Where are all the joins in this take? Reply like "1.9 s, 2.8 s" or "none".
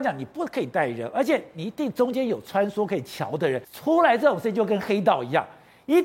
3.6 s